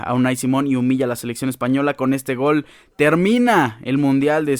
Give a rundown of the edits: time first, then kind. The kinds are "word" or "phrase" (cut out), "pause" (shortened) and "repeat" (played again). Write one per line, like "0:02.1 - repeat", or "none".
none